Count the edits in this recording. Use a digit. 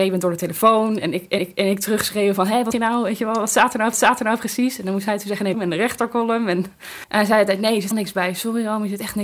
5